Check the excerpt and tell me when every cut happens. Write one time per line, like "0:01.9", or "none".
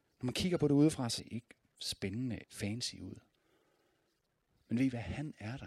0:01.2
0:02.4